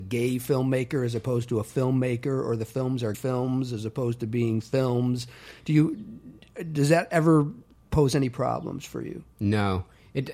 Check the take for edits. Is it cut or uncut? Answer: cut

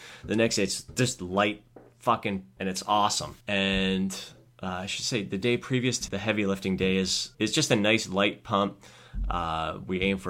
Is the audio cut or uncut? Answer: cut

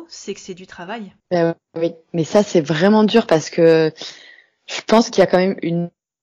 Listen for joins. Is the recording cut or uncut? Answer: cut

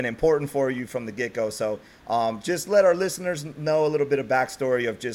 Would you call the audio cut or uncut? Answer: uncut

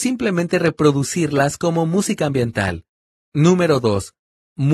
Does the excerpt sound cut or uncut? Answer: uncut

